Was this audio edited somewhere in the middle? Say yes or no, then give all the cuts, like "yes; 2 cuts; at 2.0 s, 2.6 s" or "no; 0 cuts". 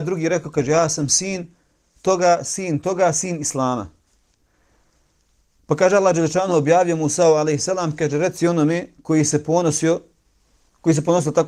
no; 0 cuts